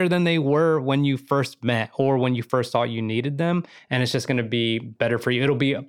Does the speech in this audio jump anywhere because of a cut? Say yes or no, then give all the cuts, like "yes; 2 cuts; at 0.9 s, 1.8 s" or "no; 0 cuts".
no; 0 cuts